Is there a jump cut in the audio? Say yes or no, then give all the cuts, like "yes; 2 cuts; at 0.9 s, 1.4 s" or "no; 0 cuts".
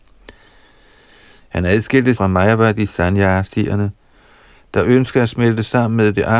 yes; 1 cut; at 2.2 s